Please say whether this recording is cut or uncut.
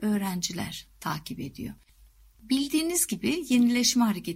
uncut